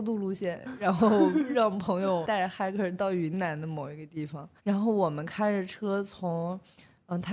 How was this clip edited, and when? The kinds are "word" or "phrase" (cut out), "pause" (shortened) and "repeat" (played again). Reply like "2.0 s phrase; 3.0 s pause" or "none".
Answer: 4.6 s pause